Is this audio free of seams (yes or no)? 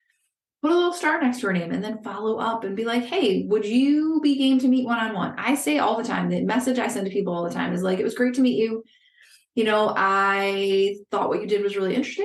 yes